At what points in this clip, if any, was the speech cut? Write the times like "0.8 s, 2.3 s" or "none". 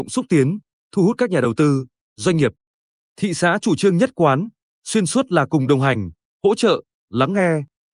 none